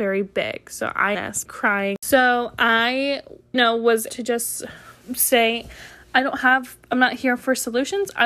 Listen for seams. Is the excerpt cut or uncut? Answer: cut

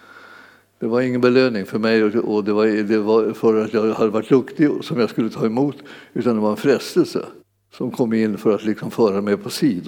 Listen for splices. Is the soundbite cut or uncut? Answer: cut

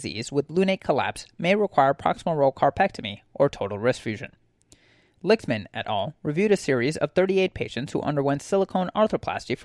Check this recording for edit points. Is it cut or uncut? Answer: uncut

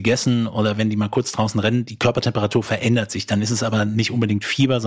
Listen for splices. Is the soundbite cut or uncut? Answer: uncut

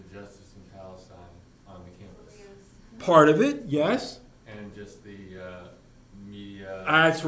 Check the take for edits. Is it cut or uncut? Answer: uncut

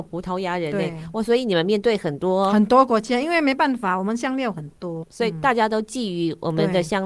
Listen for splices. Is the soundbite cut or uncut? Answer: cut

